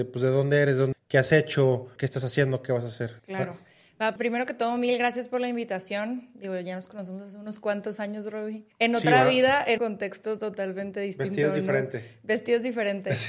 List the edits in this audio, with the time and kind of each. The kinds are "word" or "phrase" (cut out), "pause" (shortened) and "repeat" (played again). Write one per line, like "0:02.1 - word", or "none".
0:00.9 - word
0:02.0 - word
0:03.2 - pause
0:04.2 - word
0:08.7 - pause
0:09.8 - phrase

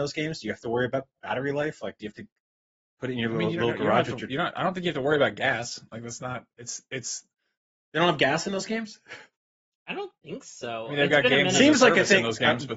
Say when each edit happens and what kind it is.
none

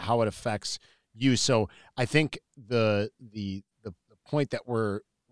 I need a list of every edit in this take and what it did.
none

